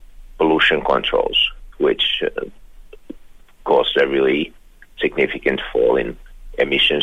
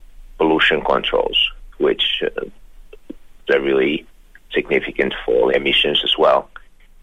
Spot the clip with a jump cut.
second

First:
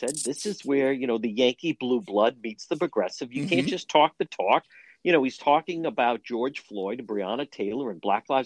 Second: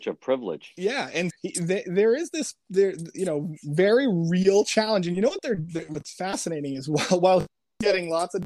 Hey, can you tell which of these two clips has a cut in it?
second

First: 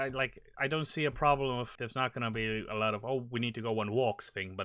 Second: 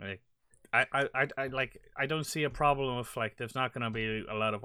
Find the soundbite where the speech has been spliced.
first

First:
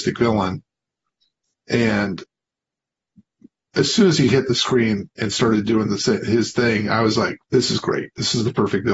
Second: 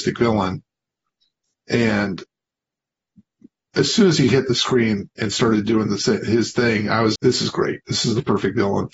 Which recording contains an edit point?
second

